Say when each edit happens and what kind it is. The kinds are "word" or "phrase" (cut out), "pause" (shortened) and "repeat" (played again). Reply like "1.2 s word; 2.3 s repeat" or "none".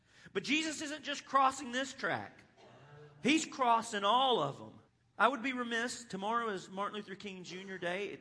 4.9 s pause